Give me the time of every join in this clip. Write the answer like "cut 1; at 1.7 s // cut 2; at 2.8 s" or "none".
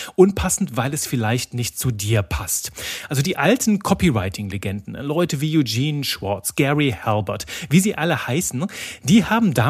none